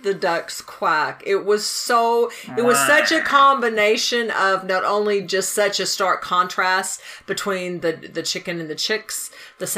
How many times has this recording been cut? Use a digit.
0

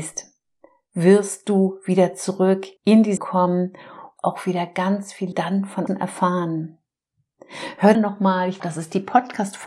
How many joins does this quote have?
7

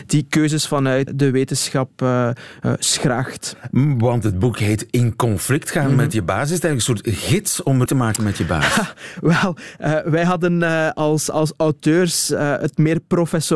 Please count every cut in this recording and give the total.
2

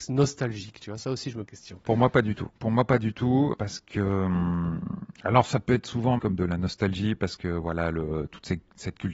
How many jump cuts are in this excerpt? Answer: 5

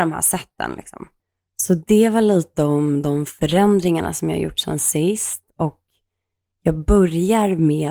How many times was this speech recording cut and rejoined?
0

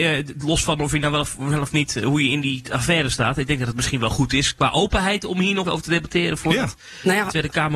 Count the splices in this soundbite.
1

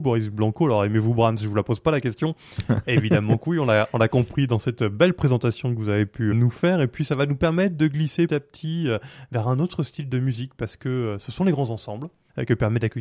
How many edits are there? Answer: 2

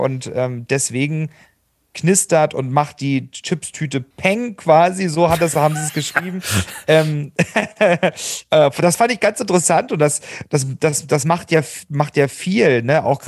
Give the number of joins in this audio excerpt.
1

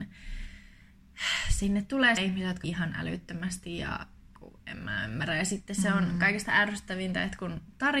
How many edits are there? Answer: 3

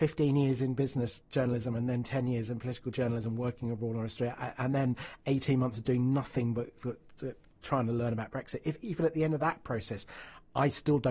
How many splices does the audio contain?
0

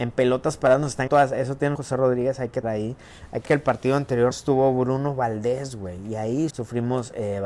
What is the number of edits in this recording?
6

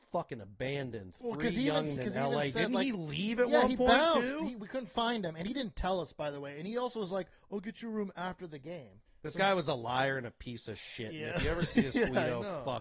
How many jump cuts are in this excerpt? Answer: 2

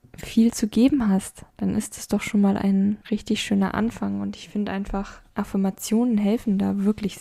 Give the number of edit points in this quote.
3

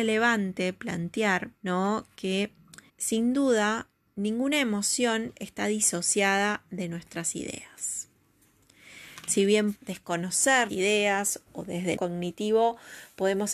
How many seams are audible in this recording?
7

